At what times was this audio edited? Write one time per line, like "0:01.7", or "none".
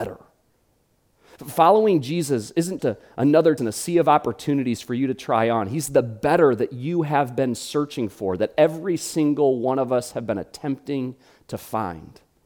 0:02.8
0:03.6